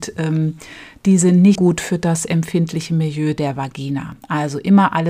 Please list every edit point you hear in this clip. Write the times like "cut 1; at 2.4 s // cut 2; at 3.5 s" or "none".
cut 1; at 1.6 s